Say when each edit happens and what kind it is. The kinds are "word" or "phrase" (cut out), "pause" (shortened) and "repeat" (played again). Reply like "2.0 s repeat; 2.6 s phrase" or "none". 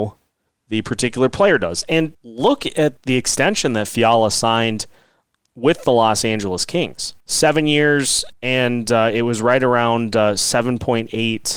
2.1 s word; 3.0 s word; 7.2 s pause; 8.3 s pause

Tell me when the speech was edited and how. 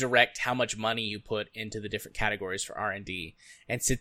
none

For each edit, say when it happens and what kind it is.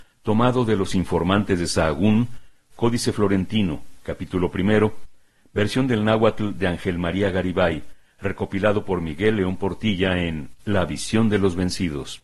none

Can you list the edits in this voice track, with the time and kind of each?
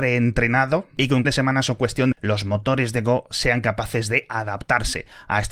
1.2 s word; 2.1 s phrase

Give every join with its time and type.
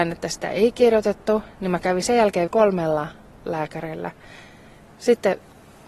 2.5 s word

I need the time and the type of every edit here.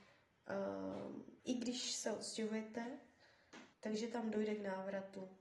1.4 s pause; 3.7 s pause

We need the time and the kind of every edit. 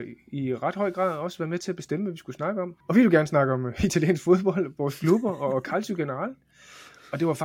2.8 s pause

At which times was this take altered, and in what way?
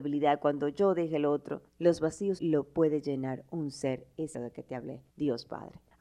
1.7 s pause; 2.4 s word; 4.3 s word; 5.1 s pause

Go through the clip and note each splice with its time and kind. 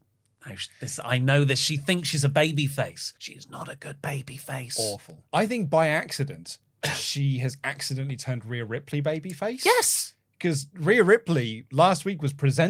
3.2 s pause; 5.3 s pause; 6.6 s pause

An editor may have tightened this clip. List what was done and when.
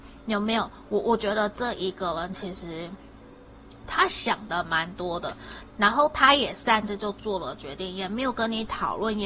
5.7 s phrase

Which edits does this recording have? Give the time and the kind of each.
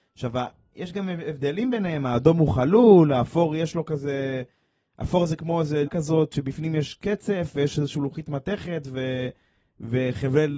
5.4 s word; 5.9 s word

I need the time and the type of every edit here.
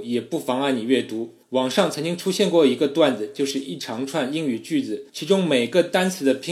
1.4 s pause; 5.1 s pause

